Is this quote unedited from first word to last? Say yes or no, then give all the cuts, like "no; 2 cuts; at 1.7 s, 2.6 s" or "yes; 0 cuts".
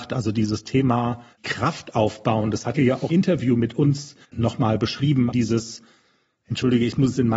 no; 5 cuts; at 1.3 s, 2.7 s, 3.1 s, 4.2 s, 5.3 s